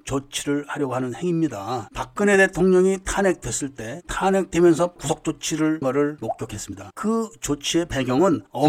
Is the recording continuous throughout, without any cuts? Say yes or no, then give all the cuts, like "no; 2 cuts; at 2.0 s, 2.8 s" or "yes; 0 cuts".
no; 3 cuts; at 5.0 s, 5.8 s, 6.2 s